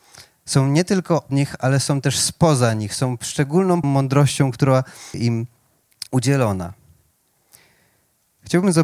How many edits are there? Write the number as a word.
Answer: four